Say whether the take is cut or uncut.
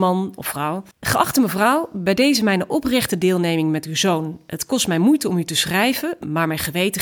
cut